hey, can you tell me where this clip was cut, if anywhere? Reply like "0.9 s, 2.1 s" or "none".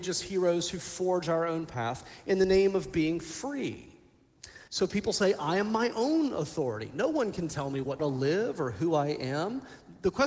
4.7 s, 8.0 s